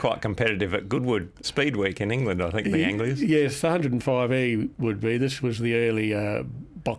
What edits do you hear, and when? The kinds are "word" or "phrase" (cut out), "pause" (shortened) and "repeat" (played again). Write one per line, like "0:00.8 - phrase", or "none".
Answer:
0:01.4 - word